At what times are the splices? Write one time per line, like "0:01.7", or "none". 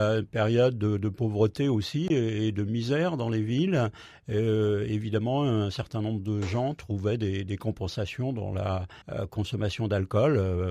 0:09.0